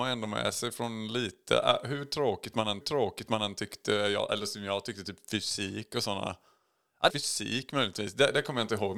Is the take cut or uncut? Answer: cut